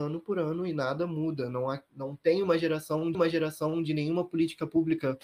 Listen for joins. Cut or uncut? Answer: cut